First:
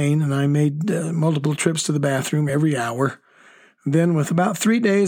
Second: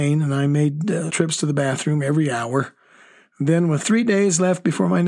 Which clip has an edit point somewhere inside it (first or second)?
second